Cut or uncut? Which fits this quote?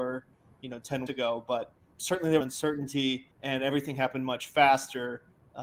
cut